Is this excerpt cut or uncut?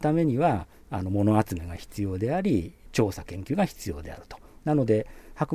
uncut